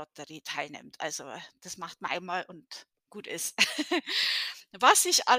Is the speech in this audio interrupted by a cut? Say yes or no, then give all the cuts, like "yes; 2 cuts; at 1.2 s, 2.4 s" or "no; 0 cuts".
no; 0 cuts